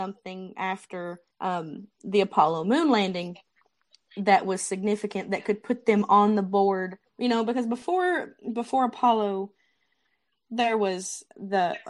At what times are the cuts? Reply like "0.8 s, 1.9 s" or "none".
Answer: 1.3 s, 7.1 s